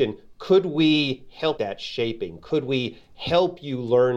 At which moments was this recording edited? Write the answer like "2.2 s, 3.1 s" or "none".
1.6 s